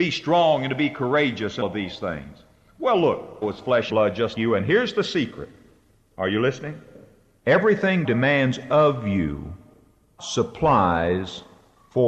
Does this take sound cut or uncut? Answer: cut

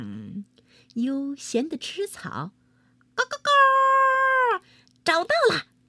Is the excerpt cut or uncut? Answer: uncut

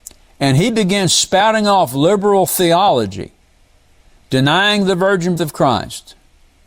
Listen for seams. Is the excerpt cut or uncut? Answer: cut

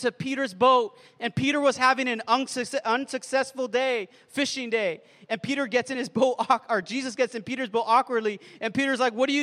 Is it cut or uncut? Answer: uncut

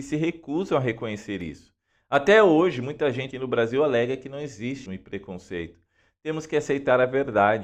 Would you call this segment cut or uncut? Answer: cut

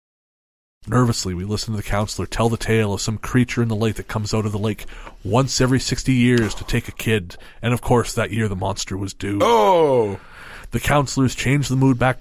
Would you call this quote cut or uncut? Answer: uncut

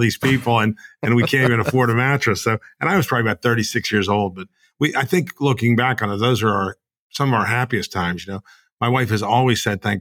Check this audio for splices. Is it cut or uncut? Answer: uncut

